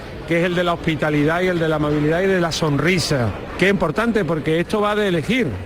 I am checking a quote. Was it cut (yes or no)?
yes